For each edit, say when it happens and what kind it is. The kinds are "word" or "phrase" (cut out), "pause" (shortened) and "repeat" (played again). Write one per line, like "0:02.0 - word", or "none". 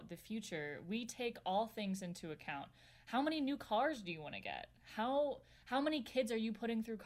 none